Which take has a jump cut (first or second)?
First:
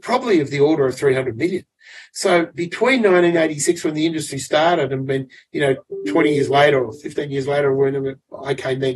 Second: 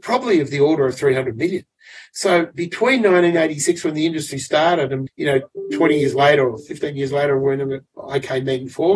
second